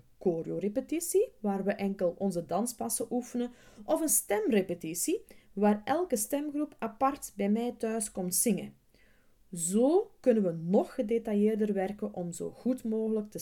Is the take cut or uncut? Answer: uncut